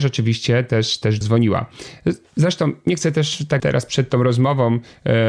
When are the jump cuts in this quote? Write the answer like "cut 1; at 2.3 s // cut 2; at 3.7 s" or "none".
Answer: cut 1; at 1.2 s // cut 2; at 3.6 s